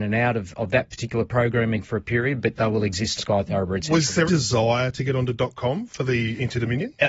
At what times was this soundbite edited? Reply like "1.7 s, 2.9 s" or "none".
2.5 s, 3.2 s, 4.3 s